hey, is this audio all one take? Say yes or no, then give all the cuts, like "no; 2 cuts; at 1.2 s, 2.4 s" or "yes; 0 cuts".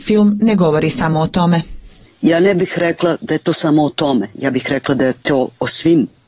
yes; 0 cuts